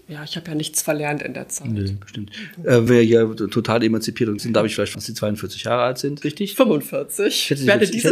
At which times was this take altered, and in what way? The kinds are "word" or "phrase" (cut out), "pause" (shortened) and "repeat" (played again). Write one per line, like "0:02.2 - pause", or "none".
0:02.9 - word
0:04.4 - word
0:04.9 - word
0:06.2 - word